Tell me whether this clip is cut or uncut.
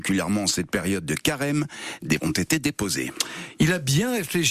cut